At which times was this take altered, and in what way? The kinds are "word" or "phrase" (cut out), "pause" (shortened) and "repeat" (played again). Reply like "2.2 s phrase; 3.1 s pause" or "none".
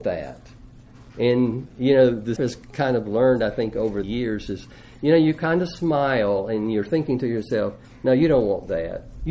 2.4 s word; 4.0 s word